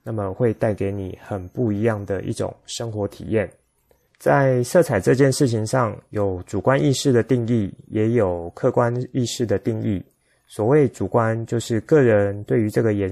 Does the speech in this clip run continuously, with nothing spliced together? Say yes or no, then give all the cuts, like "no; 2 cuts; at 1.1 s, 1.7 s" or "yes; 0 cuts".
yes; 0 cuts